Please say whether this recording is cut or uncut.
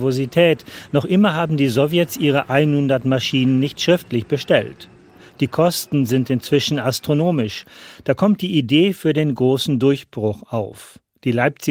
uncut